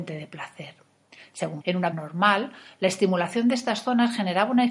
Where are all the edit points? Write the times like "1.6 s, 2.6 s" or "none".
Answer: 1.6 s, 1.9 s